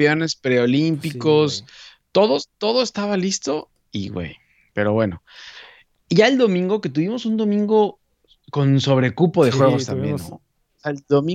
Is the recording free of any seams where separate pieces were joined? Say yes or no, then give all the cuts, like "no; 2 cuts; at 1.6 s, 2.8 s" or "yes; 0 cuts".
yes; 0 cuts